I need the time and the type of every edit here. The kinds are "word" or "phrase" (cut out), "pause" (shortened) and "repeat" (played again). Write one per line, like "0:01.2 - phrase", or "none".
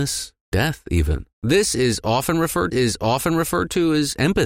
0:01.3 - pause
0:02.7 - repeat